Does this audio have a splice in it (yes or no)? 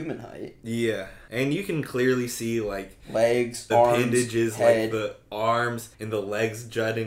yes